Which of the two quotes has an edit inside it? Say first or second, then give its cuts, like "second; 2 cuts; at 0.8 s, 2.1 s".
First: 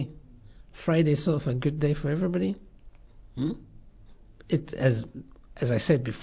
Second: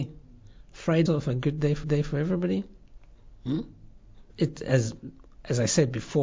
second; 3 cuts; at 1.1 s, 1.8 s, 4.3 s